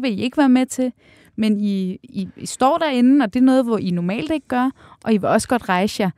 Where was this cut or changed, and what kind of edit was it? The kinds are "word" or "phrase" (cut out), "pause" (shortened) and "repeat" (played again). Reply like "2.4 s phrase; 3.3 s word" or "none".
none